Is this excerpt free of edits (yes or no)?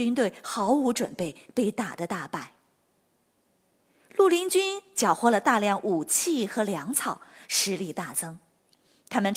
yes